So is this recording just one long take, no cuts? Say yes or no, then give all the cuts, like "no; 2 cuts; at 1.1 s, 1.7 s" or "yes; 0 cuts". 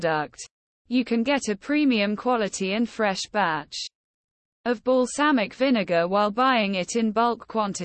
yes; 0 cuts